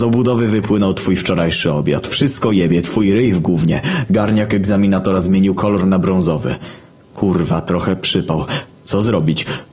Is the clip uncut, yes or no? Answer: yes